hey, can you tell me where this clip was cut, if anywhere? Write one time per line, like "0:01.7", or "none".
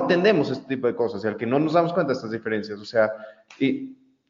none